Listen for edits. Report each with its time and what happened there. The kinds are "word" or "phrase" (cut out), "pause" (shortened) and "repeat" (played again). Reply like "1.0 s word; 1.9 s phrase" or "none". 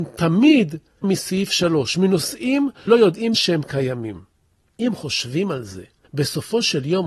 1.0 s word; 2.9 s word; 3.3 s word